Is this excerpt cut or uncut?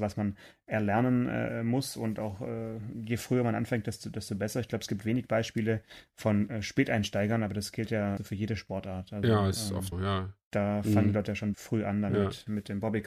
cut